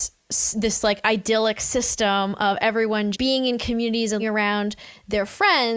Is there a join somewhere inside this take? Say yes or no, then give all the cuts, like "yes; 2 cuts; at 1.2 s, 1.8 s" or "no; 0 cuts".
yes; 2 cuts; at 3.1 s, 4.2 s